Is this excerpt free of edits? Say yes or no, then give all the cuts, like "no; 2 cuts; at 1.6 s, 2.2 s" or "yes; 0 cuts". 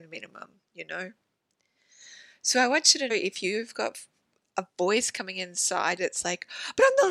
no; 2 cuts; at 3.1 s, 6.0 s